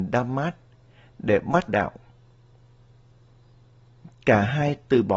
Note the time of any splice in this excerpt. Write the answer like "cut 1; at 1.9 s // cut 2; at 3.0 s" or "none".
cut 1; at 1.7 s